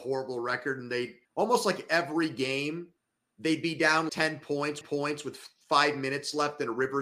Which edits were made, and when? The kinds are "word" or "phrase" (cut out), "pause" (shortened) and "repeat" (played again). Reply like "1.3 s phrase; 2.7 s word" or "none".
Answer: 1.3 s pause; 3.0 s pause; 4.1 s word; 4.8 s repeat